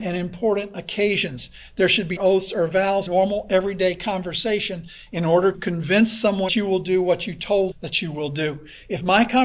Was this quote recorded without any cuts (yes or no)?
no